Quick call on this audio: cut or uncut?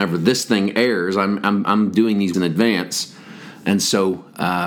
cut